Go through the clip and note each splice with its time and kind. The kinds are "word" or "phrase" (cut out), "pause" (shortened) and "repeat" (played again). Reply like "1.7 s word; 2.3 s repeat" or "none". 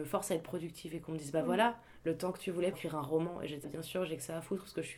2.7 s word; 3.6 s word